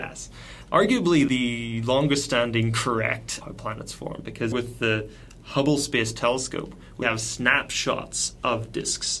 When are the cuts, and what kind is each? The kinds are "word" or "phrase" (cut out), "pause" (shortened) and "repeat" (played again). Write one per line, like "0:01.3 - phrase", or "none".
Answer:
0:01.3 - phrase
0:03.4 - phrase
0:04.5 - word
0:07.0 - word